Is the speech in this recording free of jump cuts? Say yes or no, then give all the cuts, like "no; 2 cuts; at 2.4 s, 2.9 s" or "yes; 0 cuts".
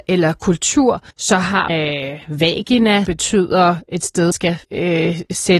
no; 5 cuts; at 1.1 s, 1.7 s, 3.1 s, 4.3 s, 4.6 s